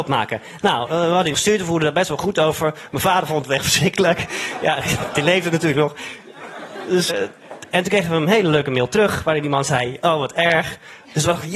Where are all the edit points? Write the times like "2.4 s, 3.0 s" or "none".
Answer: 1.3 s, 7.1 s